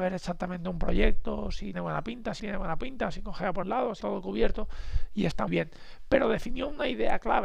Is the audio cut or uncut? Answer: cut